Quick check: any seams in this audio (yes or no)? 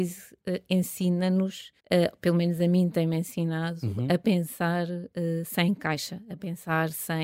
yes